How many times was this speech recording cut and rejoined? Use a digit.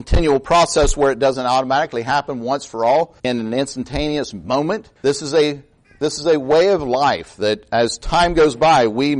2